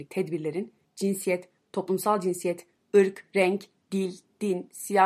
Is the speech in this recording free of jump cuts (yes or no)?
yes